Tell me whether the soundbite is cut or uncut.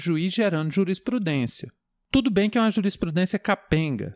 uncut